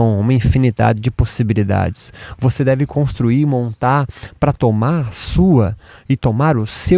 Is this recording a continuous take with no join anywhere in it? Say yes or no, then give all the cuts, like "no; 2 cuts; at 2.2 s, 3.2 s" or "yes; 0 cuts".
yes; 0 cuts